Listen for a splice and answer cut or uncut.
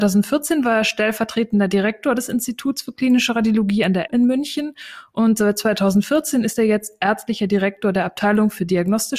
cut